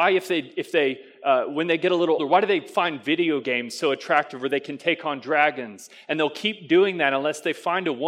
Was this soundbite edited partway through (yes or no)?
yes